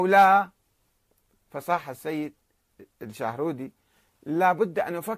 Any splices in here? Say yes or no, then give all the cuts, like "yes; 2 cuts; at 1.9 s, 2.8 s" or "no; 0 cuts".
no; 0 cuts